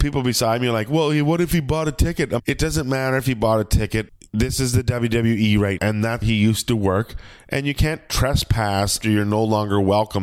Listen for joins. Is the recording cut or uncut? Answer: cut